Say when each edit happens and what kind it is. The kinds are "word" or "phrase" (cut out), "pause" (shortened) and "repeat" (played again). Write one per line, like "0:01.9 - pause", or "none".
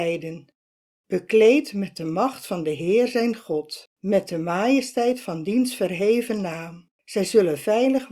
0:03.9 - pause
0:06.9 - pause